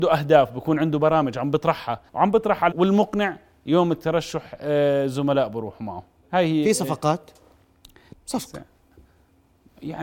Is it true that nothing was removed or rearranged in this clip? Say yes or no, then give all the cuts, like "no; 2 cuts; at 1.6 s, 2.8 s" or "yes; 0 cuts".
no; 4 cuts; at 2.1 s, 2.7 s, 6.2 s, 8.1 s